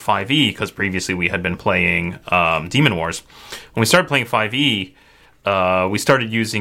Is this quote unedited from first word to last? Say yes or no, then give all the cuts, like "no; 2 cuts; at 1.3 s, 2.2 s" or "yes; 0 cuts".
yes; 0 cuts